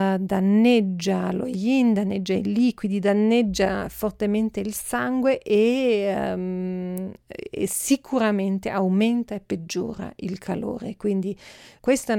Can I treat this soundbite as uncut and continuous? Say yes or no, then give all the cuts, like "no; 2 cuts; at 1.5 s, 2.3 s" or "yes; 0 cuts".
yes; 0 cuts